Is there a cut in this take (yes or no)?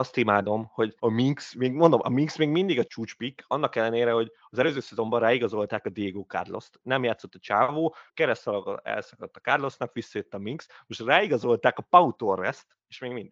yes